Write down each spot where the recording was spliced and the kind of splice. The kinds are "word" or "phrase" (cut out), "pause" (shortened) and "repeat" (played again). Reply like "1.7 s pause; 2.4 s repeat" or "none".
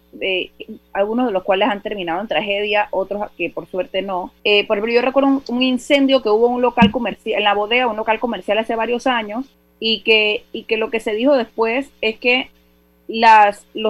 4.4 s pause; 9.5 s pause